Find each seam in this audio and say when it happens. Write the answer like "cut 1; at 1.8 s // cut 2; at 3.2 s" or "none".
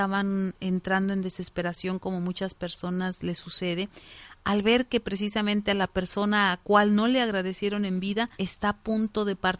cut 1; at 8.3 s